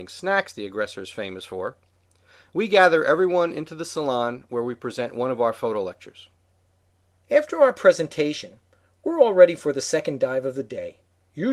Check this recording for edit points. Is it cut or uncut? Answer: uncut